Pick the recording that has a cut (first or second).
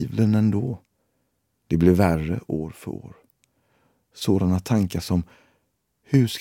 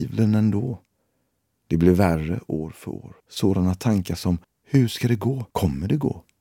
second